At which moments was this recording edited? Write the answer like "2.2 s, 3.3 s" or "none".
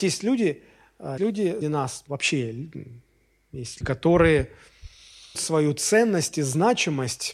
1.2 s, 1.6 s, 2.1 s, 3.8 s, 5.3 s